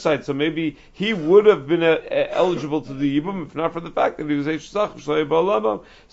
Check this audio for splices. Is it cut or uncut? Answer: uncut